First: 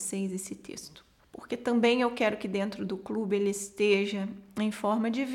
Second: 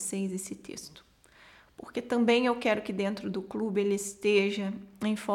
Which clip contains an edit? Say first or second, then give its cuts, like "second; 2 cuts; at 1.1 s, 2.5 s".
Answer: first; 1 cut; at 1.2 s